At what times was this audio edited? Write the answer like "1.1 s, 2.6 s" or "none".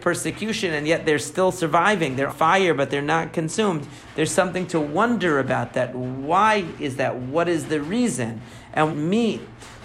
2.3 s, 8.9 s

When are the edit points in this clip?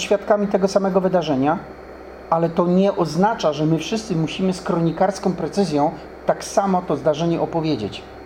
none

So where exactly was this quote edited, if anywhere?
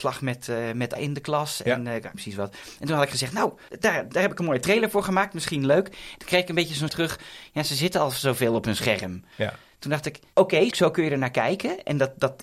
1.0 s, 2.1 s, 3.7 s, 6.9 s, 9.3 s, 10.7 s

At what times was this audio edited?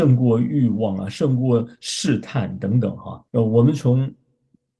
3.3 s

